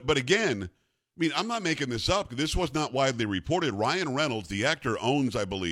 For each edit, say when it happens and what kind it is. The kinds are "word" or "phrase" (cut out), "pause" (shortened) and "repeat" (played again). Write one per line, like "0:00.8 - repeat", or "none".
none